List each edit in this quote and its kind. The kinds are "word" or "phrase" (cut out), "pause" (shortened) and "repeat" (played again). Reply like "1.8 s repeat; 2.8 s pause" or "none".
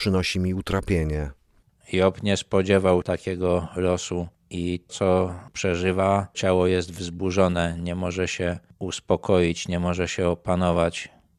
1.7 s pause; 3.0 s word; 4.9 s word; 6.3 s phrase